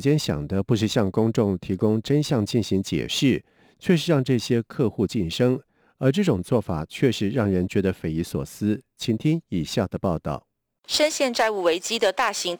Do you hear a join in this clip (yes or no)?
no